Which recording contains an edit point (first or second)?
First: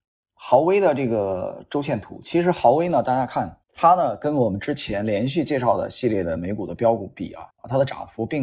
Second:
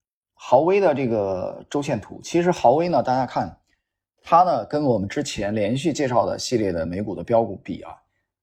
first